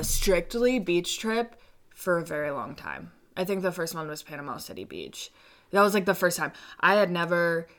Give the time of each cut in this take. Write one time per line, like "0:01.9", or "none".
none